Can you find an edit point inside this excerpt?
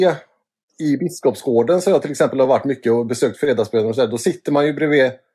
no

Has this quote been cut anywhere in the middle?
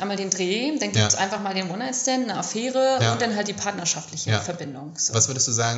no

